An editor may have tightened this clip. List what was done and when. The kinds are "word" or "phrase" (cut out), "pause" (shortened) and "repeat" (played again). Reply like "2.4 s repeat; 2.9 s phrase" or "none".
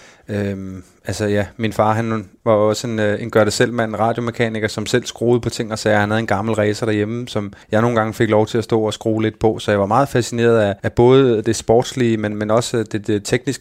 7.6 s pause; 10.8 s pause